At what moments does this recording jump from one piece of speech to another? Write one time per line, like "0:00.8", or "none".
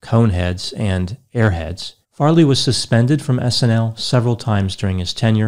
0:02.0